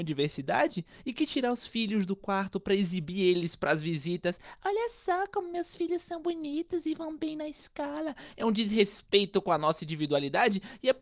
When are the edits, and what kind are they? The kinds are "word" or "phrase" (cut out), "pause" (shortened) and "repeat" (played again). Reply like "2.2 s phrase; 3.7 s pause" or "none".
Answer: none